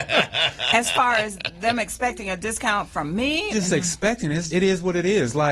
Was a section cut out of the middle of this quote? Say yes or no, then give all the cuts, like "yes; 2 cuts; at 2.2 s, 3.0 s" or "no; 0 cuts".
yes; 2 cuts; at 3.5 s, 4.5 s